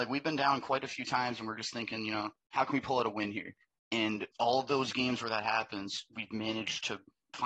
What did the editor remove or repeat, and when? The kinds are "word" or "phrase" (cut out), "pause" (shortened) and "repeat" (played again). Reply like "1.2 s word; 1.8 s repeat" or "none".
4.3 s pause